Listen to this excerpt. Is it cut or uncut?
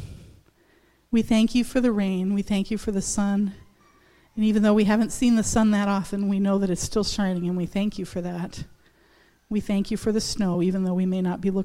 uncut